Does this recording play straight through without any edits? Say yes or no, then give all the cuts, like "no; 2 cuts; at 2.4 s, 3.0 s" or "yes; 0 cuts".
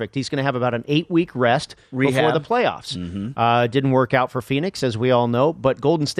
yes; 0 cuts